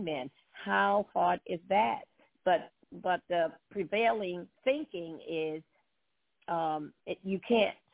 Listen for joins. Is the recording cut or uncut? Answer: cut